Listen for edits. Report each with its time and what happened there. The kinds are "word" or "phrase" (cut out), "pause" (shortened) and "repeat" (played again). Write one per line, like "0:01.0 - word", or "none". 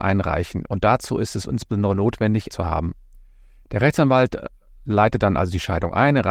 0:02.5 - phrase